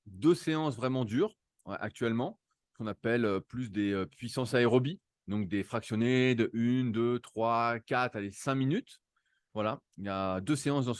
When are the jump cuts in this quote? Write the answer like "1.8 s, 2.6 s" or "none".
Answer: none